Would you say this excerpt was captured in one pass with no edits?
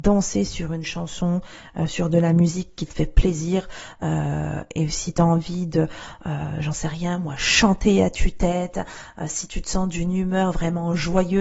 yes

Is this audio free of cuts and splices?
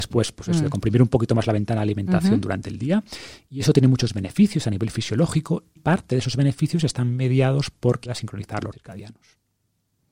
no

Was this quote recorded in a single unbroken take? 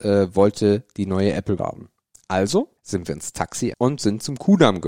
no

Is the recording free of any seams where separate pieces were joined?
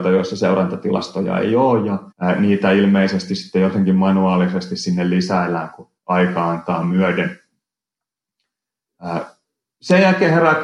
no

